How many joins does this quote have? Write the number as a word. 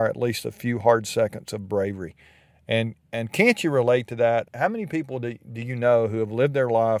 one